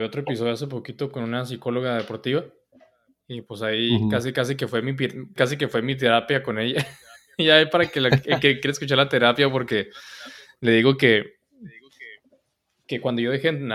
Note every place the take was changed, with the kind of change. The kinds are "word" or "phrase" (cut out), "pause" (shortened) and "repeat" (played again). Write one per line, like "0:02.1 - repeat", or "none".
0:05.4 - word